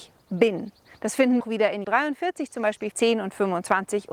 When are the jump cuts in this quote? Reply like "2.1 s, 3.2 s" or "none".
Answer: 1.4 s, 1.8 s, 2.9 s